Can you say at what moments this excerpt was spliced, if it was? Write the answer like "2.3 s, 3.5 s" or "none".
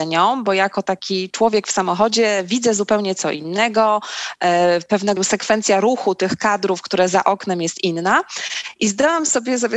5.2 s